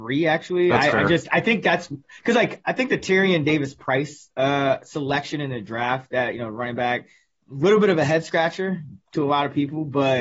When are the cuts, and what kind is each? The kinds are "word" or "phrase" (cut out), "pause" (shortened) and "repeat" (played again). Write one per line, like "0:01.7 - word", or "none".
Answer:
none